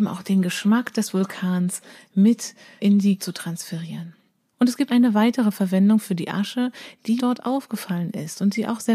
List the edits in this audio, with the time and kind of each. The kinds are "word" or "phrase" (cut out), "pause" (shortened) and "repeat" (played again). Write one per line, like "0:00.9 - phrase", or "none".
0:02.8 - word
0:03.2 - phrase
0:04.4 - pause
0:04.9 - word
0:07.2 - word